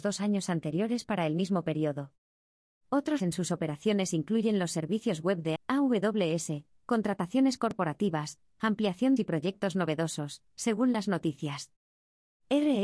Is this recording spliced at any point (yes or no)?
yes